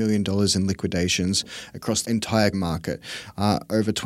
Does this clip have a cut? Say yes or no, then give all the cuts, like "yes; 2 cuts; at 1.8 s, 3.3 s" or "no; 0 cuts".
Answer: yes; 2 cuts; at 2.0 s, 2.5 s